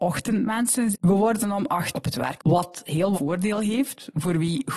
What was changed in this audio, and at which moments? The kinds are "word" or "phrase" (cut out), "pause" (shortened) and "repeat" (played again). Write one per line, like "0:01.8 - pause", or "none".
0:00.9 - word
0:01.9 - word
0:02.4 - word
0:03.1 - word